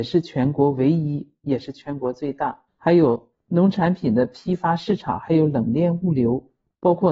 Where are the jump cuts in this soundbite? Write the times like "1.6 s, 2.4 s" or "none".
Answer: 2.7 s